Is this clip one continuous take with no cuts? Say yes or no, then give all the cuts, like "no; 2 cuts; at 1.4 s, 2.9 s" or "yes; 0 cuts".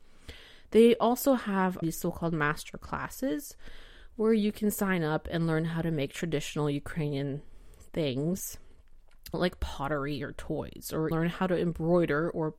no; 3 cuts; at 1.8 s, 9.3 s, 11.1 s